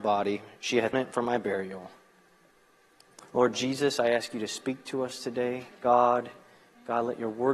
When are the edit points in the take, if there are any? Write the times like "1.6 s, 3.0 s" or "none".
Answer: 0.9 s